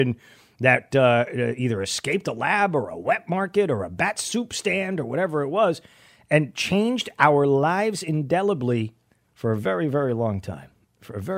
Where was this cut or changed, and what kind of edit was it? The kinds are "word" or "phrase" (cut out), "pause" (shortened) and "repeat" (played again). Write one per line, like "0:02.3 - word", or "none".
none